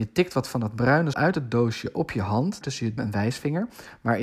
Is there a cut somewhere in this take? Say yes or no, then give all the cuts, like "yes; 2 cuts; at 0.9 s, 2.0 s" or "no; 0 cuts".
yes; 3 cuts; at 1.1 s, 2.6 s, 3.0 s